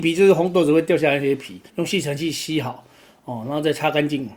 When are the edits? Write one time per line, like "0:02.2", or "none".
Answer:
0:01.7

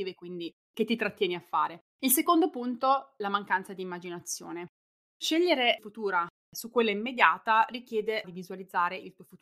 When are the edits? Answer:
0:01.9
0:03.2
0:05.8
0:08.2

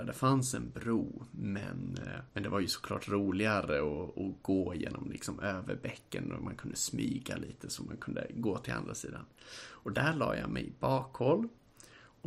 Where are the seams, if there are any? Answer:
0:02.3

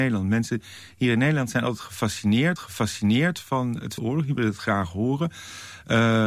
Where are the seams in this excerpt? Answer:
0:02.6
0:04.0

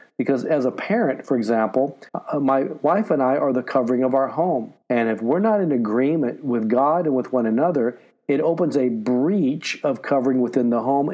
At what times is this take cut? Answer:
0:02.1
0:04.8

